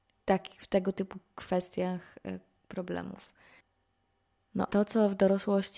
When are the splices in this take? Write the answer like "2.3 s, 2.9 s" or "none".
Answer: 4.7 s